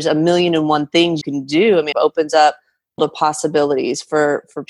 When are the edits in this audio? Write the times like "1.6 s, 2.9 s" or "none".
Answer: 1.2 s, 1.9 s, 3.0 s